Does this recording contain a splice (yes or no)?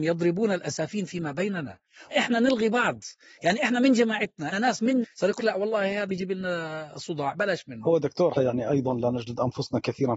yes